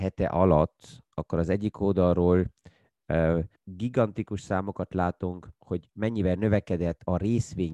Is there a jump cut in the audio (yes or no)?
yes